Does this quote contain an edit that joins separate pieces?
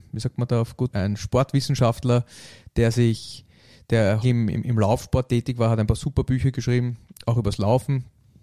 yes; 2 cuts; at 0.9 s, 4.2 s

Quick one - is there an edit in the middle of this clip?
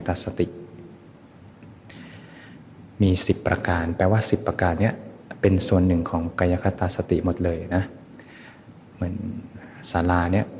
no; 0 cuts

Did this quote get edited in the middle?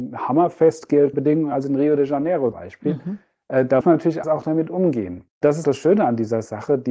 yes; 5 cuts; at 1.1 s, 2.5 s, 3.8 s, 4.2 s, 5.6 s

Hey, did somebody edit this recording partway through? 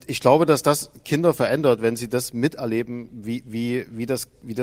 no; 0 cuts

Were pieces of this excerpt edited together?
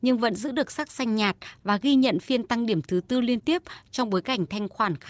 no; 0 cuts

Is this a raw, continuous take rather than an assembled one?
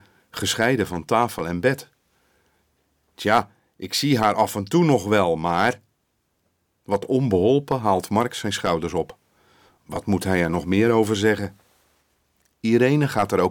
yes; 0 cuts

